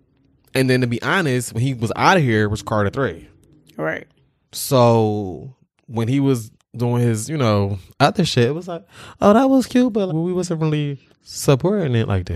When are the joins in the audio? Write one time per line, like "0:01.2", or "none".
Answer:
0:06.6
0:10.1
0:11.1